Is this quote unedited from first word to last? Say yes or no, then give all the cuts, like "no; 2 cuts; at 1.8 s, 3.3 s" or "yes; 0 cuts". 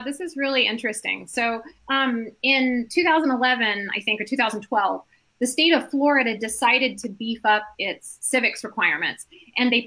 no; 1 cut; at 1.8 s